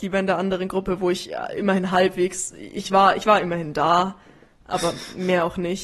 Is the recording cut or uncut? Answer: uncut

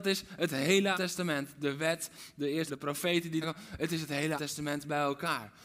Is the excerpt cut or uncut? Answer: cut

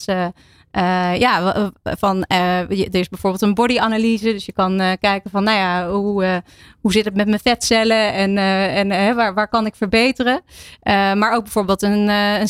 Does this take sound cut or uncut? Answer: uncut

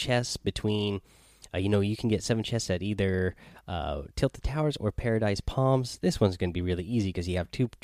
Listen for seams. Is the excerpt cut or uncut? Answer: uncut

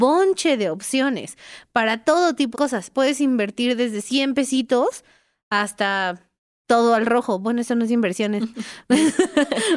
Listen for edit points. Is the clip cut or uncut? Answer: cut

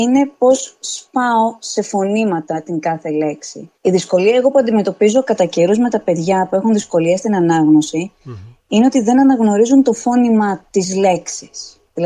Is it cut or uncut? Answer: cut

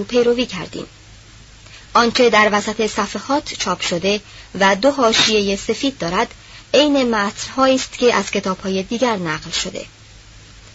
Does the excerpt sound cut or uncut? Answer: uncut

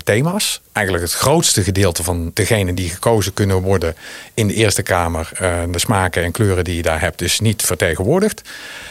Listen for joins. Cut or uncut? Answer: uncut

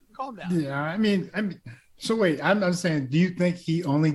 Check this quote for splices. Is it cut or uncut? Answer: uncut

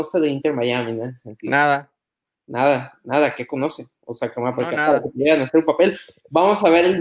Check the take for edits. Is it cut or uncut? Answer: uncut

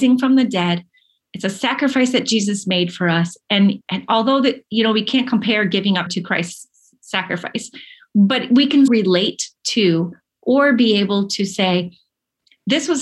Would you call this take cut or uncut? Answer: cut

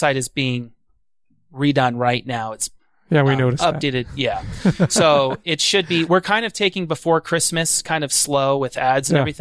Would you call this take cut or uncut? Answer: uncut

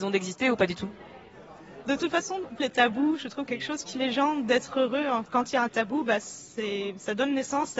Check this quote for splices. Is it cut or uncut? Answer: cut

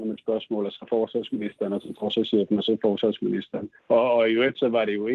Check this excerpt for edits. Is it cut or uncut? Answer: cut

